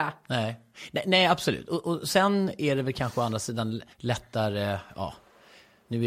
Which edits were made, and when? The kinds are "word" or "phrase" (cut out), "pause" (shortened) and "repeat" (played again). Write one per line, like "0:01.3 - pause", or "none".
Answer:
0:03.9 - pause